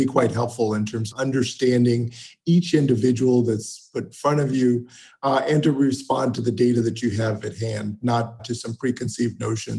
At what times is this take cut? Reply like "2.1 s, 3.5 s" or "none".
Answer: 1.1 s, 8.4 s